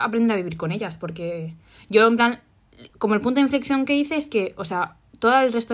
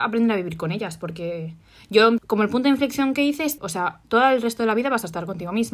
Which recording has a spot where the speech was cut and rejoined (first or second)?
second